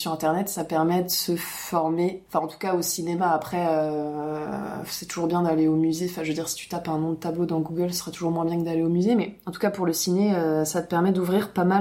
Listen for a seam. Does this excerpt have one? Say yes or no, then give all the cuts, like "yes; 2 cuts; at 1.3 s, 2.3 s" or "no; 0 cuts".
no; 0 cuts